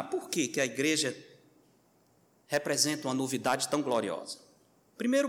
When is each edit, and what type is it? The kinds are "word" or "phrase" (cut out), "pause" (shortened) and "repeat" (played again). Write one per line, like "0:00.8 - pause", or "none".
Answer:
none